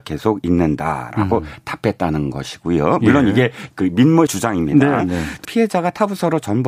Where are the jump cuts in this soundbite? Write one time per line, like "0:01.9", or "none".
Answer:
0:03.7
0:04.3
0:05.4

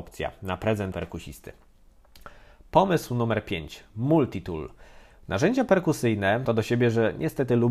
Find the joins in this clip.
0:00.9
0:06.4

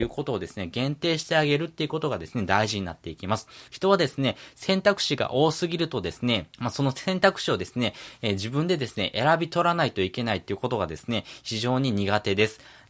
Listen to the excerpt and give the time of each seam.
0:03.7
0:06.5

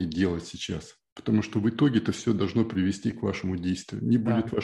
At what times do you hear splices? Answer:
none

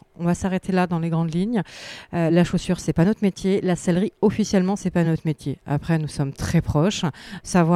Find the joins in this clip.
none

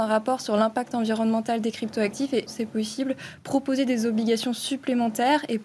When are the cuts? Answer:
0:02.5

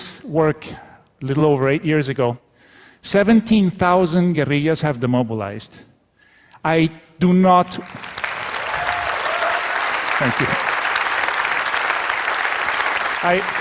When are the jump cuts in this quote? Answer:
none

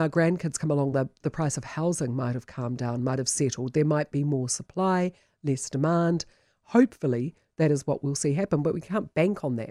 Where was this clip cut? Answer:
none

